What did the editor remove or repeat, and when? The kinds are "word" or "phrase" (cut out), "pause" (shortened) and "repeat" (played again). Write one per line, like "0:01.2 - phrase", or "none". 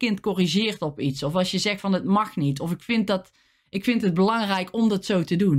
none

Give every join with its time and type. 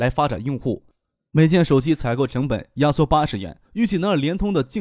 0:03.7 - pause

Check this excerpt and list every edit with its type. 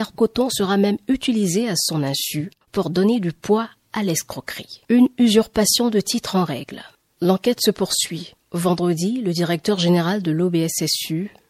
0:02.6 - pause
0:04.8 - pause
0:08.4 - pause

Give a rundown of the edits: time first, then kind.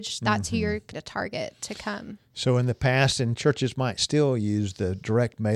0:00.9 - word

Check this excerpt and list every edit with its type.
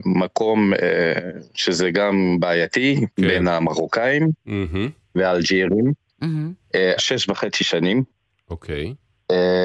0:07.0 - phrase

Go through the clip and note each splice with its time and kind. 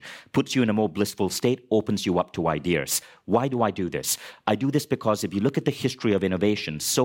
none

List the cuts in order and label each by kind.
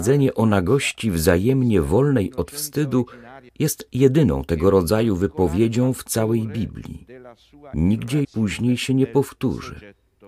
0:03.5 - pause
0:08.2 - word

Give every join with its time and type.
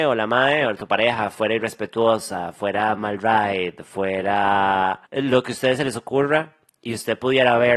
0:05.0 - pause

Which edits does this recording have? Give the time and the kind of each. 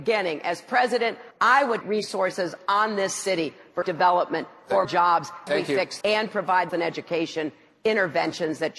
0:01.3 - pause
0:01.8 - word
0:03.8 - word
0:04.8 - word
0:05.5 - word
0:06.0 - word
0:06.7 - phrase

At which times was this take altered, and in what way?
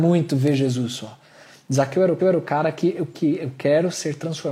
0:02.2 - repeat

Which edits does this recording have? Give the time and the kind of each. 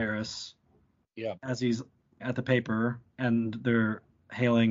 0:02.2 - word
0:03.1 - pause

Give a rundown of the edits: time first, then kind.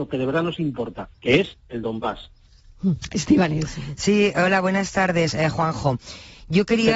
0:01.1 - pause

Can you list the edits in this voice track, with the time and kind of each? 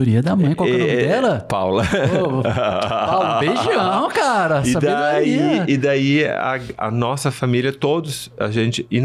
none

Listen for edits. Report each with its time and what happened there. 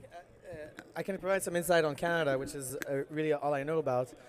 none

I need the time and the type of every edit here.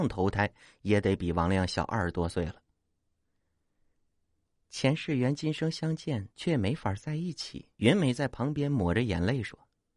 0:06.3 - pause
0:07.7 - pause

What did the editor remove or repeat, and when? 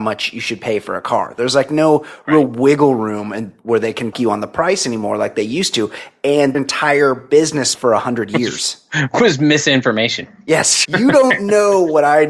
0:04.1 - word
0:06.5 - phrase
0:07.7 - word
0:10.8 - word

